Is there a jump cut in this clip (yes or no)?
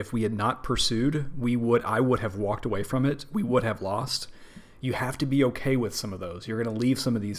no